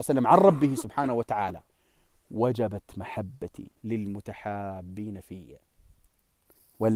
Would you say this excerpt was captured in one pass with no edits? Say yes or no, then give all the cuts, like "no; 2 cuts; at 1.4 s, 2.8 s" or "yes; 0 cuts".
no; 1 cut; at 3.8 s